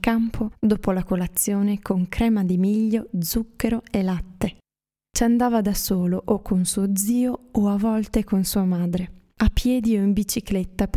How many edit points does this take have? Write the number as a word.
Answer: zero